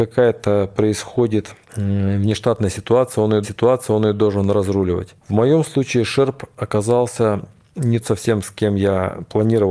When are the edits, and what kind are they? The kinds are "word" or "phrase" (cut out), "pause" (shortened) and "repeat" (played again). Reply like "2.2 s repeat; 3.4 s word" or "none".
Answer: 1.6 s pause; 3.4 s repeat; 5.2 s pause; 8.0 s word